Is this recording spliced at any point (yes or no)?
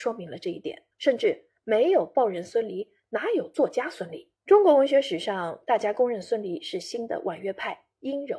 yes